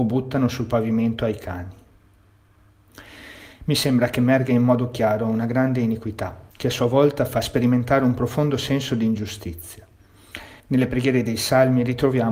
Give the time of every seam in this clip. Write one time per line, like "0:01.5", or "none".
0:03.5
0:06.5
0:10.6